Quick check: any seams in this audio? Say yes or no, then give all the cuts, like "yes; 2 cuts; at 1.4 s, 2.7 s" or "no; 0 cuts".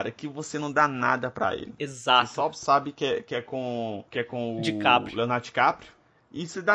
yes; 1 cut; at 4.1 s